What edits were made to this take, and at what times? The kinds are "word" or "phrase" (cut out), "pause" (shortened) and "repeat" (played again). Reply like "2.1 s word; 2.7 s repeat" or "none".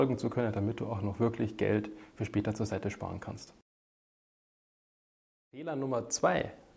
none